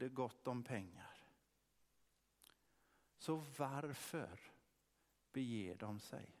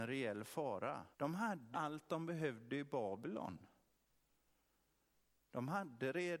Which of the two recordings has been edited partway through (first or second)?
second